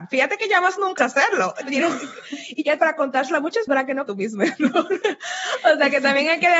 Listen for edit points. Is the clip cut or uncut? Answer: cut